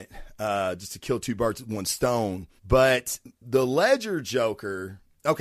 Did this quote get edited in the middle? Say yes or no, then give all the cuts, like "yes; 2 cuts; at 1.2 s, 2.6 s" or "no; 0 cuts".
yes; 1 cut; at 2.6 s